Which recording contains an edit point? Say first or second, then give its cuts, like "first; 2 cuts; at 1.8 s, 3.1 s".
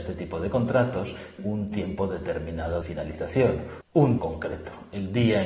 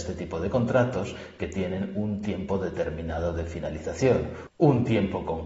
first; 3 cuts; at 1.4 s, 2.8 s, 4.2 s